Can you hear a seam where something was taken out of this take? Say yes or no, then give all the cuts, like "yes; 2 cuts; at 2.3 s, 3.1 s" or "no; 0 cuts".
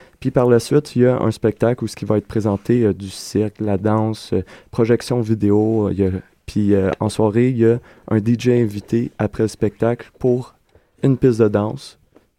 no; 0 cuts